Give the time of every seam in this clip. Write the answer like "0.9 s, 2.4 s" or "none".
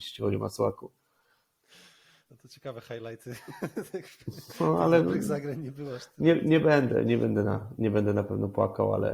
none